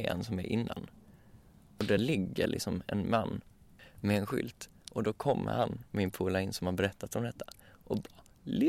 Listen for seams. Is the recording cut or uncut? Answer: uncut